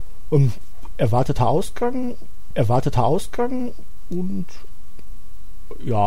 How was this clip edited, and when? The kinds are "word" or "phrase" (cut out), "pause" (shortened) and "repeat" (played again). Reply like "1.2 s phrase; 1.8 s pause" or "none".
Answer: 2.5 s repeat